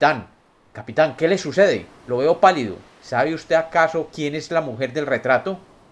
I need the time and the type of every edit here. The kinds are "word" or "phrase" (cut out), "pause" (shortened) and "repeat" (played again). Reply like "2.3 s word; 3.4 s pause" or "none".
2.0 s pause; 2.9 s pause